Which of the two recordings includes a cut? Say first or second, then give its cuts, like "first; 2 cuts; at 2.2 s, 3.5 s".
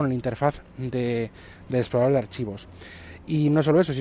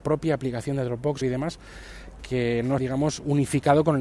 second; 3 cuts; at 1.2 s, 2.2 s, 2.8 s